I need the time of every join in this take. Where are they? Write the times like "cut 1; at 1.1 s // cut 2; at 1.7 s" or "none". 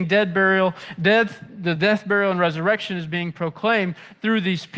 none